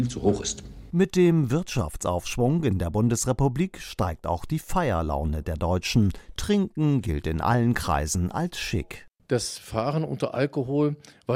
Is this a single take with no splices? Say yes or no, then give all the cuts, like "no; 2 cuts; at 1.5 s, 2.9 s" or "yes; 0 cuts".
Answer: yes; 0 cuts